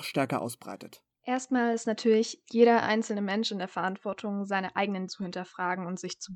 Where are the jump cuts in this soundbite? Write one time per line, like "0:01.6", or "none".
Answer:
0:05.1